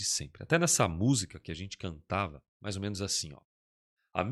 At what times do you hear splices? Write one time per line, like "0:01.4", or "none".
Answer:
0:02.5